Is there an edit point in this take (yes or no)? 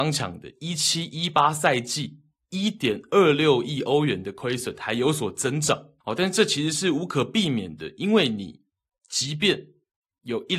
yes